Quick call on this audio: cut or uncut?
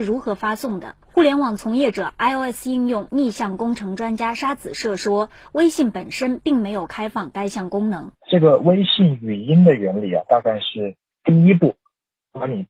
cut